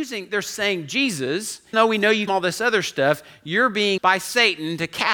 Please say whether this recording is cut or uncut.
cut